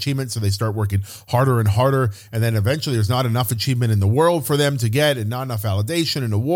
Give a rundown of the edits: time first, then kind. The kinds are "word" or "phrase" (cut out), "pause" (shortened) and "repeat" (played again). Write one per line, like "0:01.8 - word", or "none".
none